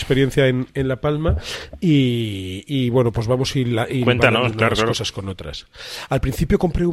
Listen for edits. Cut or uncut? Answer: uncut